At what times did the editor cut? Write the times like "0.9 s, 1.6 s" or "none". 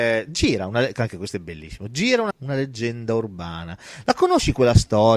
2.3 s